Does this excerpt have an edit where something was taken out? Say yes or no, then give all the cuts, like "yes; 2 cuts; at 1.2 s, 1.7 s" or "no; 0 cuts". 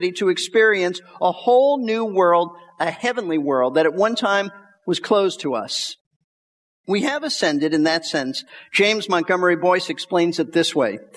no; 0 cuts